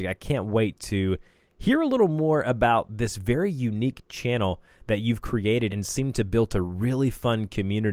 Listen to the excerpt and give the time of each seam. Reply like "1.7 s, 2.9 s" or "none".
5.7 s